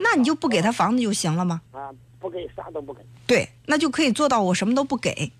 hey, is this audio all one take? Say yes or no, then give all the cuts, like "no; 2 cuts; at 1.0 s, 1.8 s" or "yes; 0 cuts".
no; 2 cuts; at 1.7 s, 3.6 s